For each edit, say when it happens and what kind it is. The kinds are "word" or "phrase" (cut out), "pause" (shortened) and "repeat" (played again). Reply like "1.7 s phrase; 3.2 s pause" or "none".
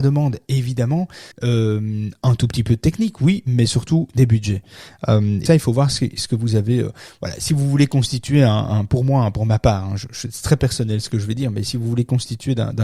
1.3 s pause; 5.5 s word